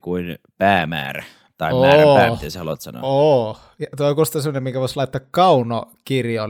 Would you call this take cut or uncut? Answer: uncut